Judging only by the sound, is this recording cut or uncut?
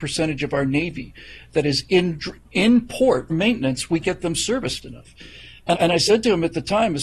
cut